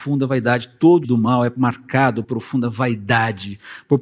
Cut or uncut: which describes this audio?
cut